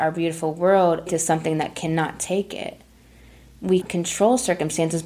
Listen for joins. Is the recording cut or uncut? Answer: cut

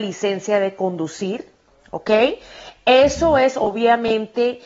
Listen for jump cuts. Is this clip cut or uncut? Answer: uncut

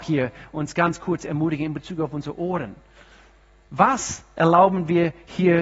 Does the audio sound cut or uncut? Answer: uncut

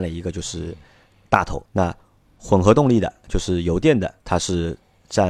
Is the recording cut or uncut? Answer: cut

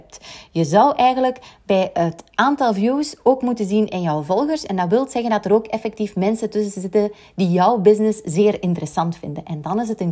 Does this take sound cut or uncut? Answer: uncut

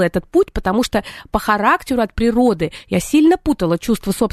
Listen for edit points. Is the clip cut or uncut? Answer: uncut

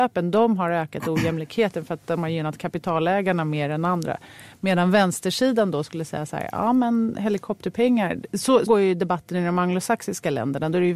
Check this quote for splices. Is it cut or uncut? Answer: cut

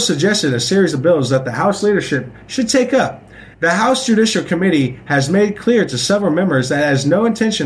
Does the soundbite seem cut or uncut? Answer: cut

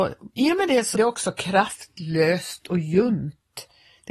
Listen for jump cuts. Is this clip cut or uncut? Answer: cut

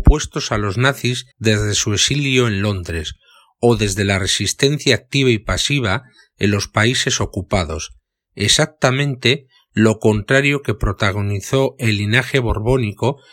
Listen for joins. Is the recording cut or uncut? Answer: cut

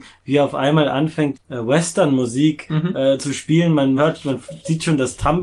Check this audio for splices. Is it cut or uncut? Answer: cut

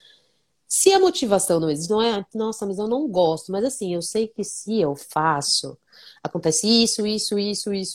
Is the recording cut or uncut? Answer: uncut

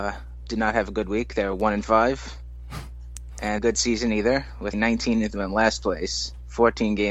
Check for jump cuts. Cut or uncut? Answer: cut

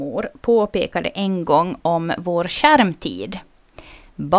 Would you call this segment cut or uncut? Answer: uncut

